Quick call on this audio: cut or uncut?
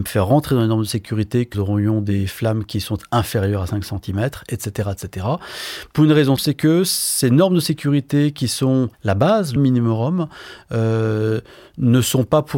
cut